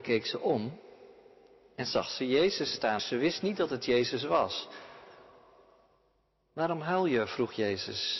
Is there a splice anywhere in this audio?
yes; 1 cut; at 3.0 s

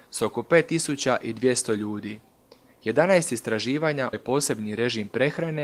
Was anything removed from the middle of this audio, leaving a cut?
yes; 1 cut; at 4.1 s

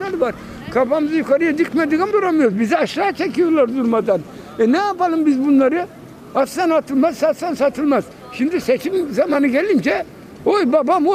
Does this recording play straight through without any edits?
no; 1 cut; at 2.1 s

